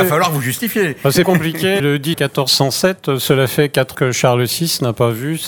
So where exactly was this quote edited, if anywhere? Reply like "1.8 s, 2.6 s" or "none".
1.2 s, 1.8 s, 2.1 s, 3.9 s

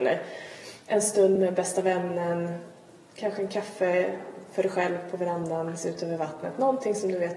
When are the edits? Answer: none

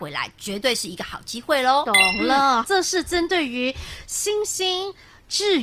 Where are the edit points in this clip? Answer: 2.6 s

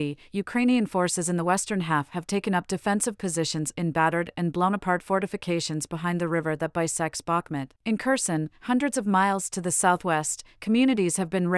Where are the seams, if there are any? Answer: 7.8 s

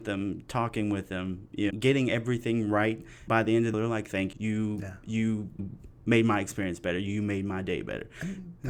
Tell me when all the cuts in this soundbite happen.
1.7 s, 3.3 s, 3.7 s, 4.3 s, 5.6 s

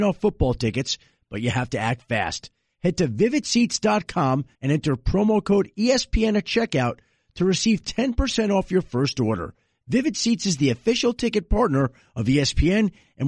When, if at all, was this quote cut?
4.5 s

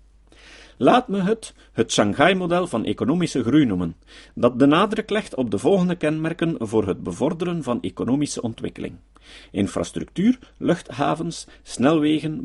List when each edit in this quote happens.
none

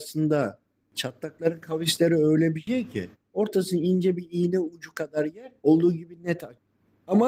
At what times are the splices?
3.1 s, 5.6 s

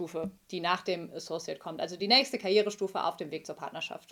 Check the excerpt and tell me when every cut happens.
none

